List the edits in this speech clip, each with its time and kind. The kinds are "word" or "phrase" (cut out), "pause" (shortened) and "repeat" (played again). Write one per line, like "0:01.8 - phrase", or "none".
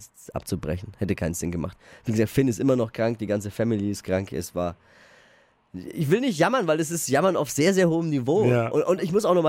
none